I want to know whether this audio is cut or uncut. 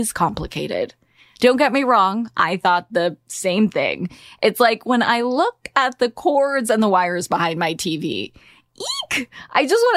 uncut